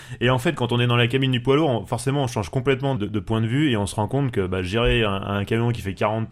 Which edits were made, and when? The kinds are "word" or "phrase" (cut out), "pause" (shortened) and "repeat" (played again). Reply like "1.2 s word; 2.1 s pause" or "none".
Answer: 3.0 s word